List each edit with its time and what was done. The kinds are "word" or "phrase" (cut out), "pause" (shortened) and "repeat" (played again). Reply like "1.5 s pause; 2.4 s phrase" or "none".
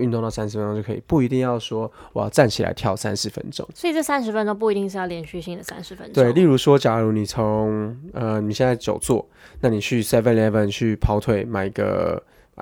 none